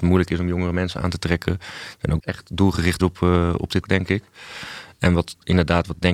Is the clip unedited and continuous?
no; 3 cuts; at 2.2 s, 3.0 s, 3.8 s

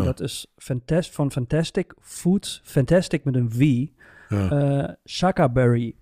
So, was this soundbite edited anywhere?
no; 0 cuts

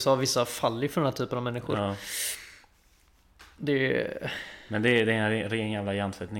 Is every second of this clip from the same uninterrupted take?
yes; 0 cuts

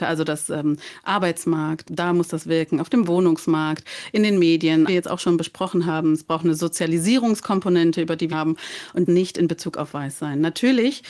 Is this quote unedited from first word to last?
no; 4 cuts; at 1.9 s, 4.9 s, 8.3 s, 9.1 s

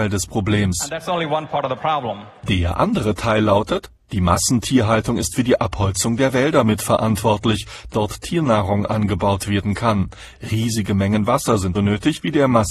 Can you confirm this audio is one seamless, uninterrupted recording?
no; 2 cuts; at 7.9 s, 11.7 s

